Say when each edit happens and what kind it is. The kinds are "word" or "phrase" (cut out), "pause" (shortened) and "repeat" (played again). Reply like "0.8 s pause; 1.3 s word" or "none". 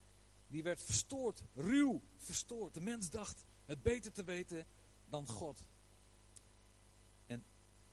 2.7 s word

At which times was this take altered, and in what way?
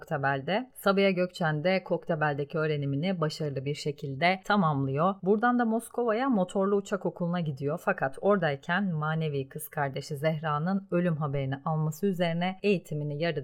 none

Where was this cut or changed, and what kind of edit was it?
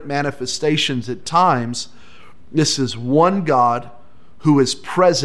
1.2 s word

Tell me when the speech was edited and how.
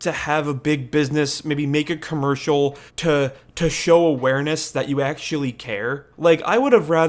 2.9 s pause; 6.1 s pause

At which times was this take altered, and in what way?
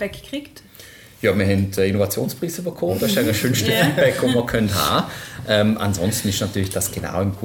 none

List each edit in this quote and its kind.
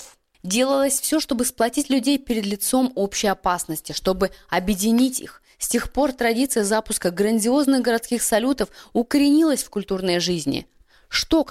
none

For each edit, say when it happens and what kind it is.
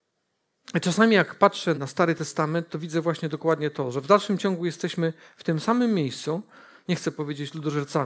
1.7 s word

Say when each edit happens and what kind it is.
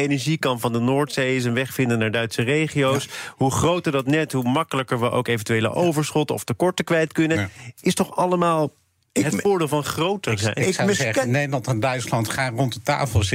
none

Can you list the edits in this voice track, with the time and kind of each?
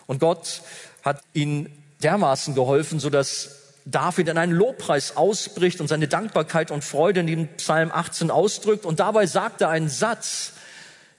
1.2 s word

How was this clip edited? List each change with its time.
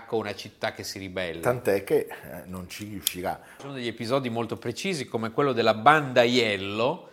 none

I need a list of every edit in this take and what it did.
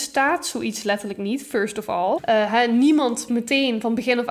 3.3 s word

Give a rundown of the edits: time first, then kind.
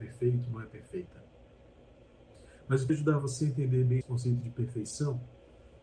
2.9 s word; 4.0 s word

